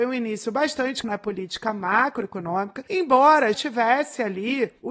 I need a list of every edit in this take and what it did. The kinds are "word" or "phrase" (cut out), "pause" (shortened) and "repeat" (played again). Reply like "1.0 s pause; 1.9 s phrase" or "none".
1.0 s word; 3.5 s word